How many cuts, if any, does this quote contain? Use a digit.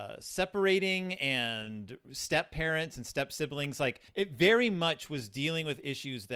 1